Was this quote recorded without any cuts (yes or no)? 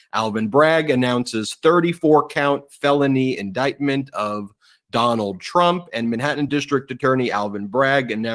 yes